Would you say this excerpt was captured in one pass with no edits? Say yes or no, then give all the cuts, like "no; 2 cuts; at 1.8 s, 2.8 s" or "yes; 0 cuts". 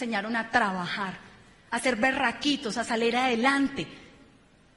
yes; 0 cuts